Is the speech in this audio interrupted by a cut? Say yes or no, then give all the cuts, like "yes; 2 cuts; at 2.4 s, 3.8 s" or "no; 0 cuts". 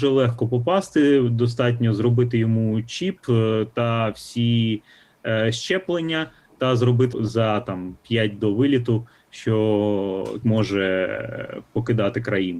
yes; 3 cuts; at 7.1 s, 8.4 s, 10.4 s